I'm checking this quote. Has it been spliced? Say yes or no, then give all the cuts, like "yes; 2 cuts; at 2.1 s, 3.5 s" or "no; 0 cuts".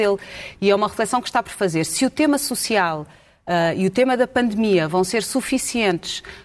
no; 0 cuts